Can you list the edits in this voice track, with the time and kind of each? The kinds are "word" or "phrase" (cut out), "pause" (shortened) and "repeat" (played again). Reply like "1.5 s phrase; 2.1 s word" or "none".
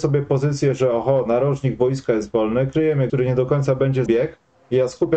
3.1 s word; 4.1 s phrase